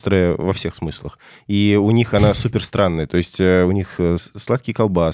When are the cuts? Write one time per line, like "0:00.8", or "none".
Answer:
0:04.2